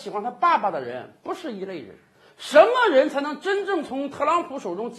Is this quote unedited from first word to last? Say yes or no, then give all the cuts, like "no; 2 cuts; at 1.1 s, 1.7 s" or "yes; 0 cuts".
yes; 0 cuts